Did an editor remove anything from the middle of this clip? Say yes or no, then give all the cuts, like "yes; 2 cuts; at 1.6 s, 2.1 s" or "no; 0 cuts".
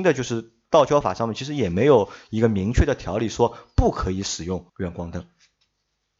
yes; 1 cut; at 4.7 s